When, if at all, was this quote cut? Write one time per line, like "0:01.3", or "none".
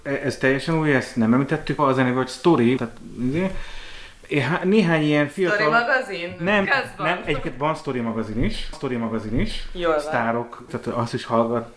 0:01.8
0:02.8
0:06.6
0:08.7
0:10.7